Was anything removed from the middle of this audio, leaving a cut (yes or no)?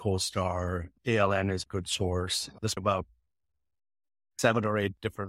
yes